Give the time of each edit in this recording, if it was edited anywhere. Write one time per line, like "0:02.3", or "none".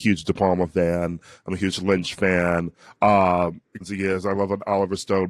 0:03.8